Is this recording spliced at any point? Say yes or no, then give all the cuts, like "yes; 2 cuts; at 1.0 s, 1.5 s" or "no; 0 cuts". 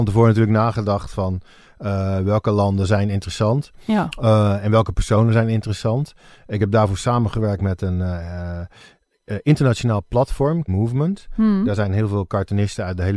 yes; 1 cut; at 10.7 s